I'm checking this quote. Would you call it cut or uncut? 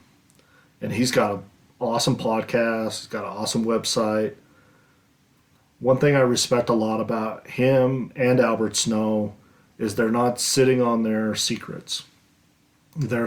uncut